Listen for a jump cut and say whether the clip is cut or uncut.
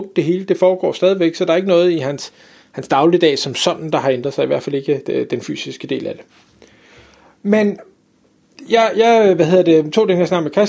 uncut